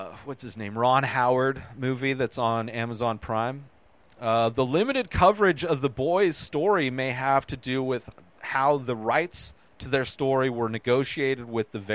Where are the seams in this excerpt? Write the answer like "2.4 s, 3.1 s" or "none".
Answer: none